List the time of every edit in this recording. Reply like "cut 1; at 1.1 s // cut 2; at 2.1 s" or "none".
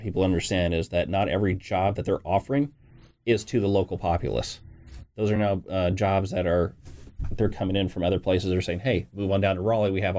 none